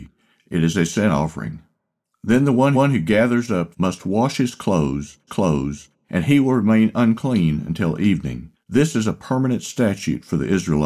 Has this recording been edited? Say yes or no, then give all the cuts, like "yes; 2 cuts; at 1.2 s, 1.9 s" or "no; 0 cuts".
yes; 4 cuts; at 2.7 s, 3.7 s, 5.3 s, 8.5 s